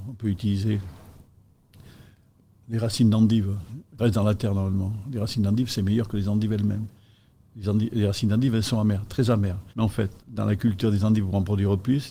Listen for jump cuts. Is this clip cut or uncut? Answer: cut